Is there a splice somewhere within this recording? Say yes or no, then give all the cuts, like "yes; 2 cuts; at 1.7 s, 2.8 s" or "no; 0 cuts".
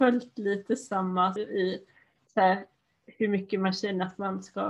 yes; 2 cuts; at 1.4 s, 2.2 s